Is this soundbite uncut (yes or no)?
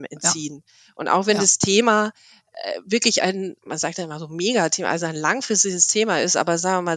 no